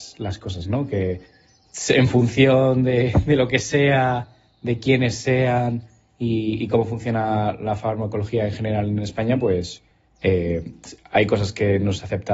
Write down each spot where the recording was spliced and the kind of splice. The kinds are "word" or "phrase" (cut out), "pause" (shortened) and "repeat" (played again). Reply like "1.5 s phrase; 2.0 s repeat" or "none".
none